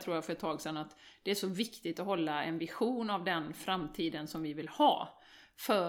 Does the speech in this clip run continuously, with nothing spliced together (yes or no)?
yes